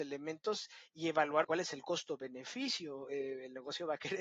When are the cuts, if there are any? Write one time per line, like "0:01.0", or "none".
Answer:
0:01.4